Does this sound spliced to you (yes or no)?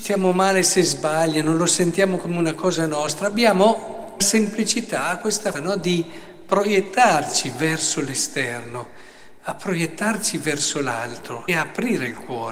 yes